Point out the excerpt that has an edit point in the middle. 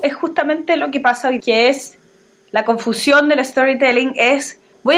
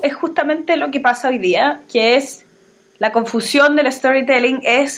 first; 1 cut; at 1.4 s

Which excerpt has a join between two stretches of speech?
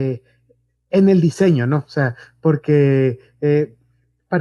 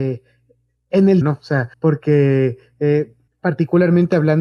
second; 3 cuts; at 1.2 s, 1.7 s, 3.3 s

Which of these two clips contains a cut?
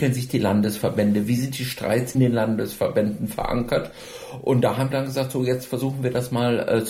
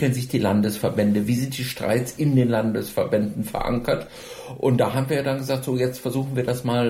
first; 2 cuts; at 2.1 s, 4.9 s

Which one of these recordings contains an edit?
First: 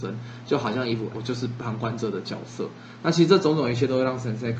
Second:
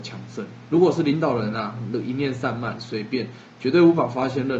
first; 1 cut; at 1.1 s

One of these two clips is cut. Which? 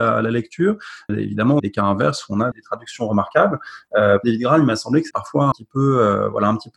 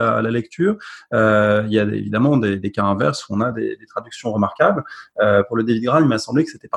first; 6 cuts; at 1.1 s, 1.6 s, 2.5 s, 4.2 s, 5.1 s, 5.5 s

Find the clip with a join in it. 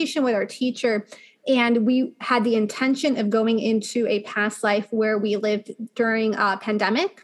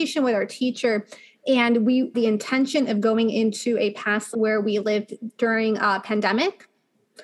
second; 2 cuts; at 2.1 s, 4.3 s

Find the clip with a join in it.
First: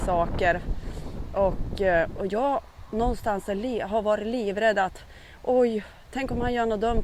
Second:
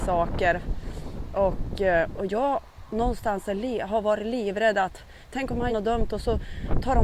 second; 2 cuts; at 5.2 s, 5.7 s

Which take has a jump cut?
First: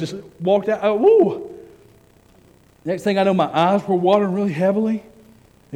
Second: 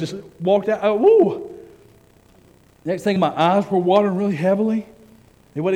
second; 1 cut; at 3.2 s

